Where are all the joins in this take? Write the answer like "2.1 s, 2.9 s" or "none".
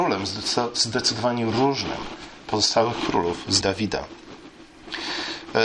2.4 s, 3.6 s

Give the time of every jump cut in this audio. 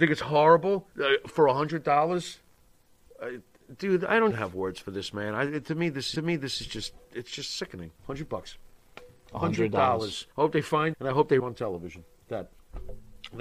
0.9 s, 4.3 s, 6.2 s, 7.0 s, 8.0 s, 10.3 s, 10.9 s, 11.4 s, 12.3 s

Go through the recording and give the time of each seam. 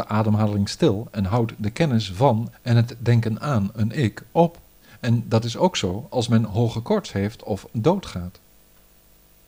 none

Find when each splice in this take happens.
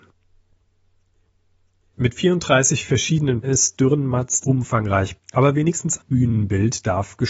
3.4 s, 4.4 s, 5.2 s, 6.0 s

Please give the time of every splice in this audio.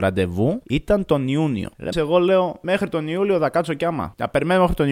1.9 s

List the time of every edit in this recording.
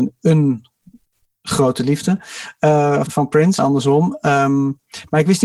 3.1 s, 3.6 s

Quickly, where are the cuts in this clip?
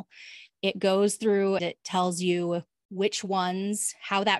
1.6 s

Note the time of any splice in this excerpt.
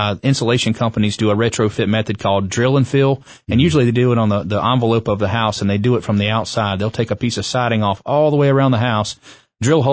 none

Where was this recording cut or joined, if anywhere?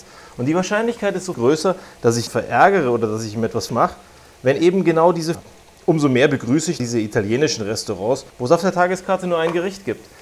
1.3 s, 2.3 s, 3.7 s, 4.6 s, 5.3 s, 6.8 s, 8.3 s

